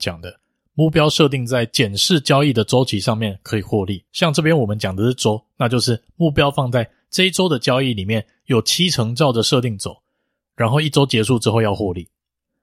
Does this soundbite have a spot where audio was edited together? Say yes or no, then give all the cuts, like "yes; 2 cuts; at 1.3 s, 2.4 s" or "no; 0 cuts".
yes; 1 cut; at 4.1 s